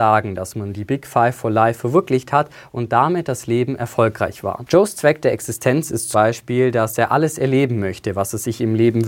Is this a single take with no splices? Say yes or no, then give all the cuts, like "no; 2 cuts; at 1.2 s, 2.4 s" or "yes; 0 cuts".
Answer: no; 1 cut; at 6.1 s